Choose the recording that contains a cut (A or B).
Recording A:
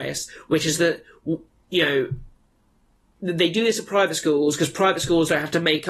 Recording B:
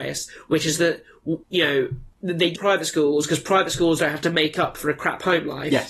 B